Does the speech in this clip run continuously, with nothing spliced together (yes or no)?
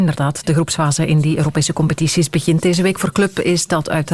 yes